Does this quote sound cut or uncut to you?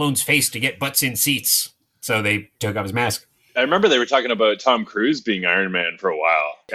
uncut